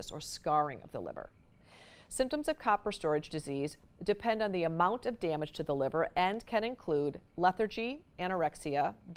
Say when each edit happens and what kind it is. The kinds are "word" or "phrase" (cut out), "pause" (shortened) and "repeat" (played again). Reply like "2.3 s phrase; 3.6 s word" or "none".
none